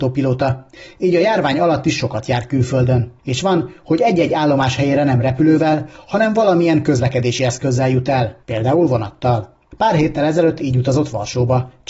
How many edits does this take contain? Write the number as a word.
zero